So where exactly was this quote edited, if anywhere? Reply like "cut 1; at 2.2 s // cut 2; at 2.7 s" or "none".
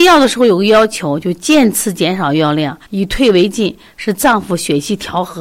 cut 1; at 2.8 s

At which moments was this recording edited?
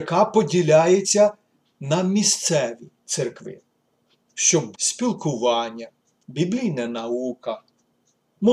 cut 1; at 2.9 s // cut 2; at 4.7 s

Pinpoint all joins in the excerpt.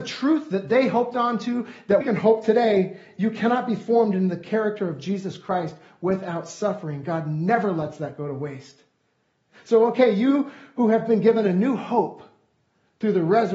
cut 1; at 2.0 s

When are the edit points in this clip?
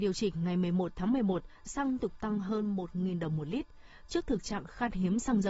cut 1; at 1.7 s // cut 2; at 2.0 s

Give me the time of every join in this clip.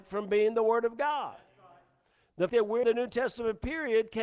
cut 1; at 2.5 s // cut 2; at 2.8 s

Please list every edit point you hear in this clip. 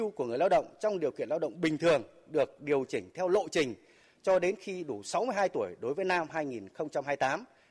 cut 1; at 6.3 s

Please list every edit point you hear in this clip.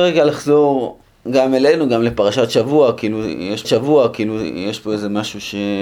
cut 1; at 1.1 s // cut 2; at 3.6 s

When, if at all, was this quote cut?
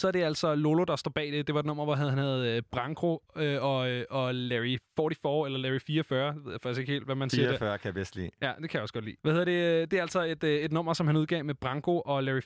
cut 1; at 4.9 s // cut 2; at 9.2 s

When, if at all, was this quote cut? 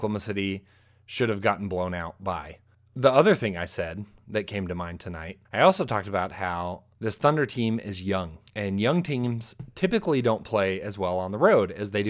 cut 1; at 2.7 s // cut 2; at 5.5 s // cut 3; at 6.9 s // cut 4; at 8.5 s

